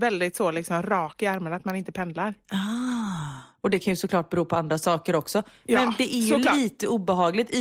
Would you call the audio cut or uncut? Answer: uncut